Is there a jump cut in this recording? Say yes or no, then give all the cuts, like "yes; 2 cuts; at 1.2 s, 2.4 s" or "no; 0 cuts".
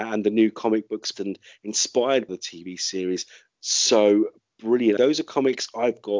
yes; 3 cuts; at 1.1 s, 2.3 s, 5.0 s